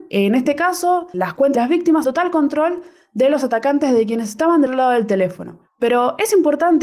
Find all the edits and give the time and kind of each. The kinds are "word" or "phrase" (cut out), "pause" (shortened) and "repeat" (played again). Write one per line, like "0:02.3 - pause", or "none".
0:01.1 - word
0:01.5 - word
0:02.0 - word
0:04.7 - word